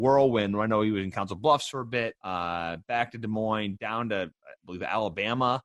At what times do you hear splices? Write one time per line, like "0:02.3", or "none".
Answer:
0:02.2